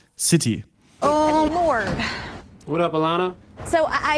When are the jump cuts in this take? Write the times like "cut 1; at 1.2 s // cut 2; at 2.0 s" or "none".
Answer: cut 1; at 1.5 s